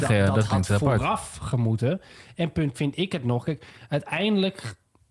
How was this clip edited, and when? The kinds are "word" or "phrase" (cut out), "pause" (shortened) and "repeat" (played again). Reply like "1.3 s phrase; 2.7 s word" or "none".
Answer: 2.7 s word